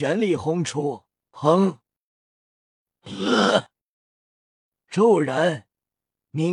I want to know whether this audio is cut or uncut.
cut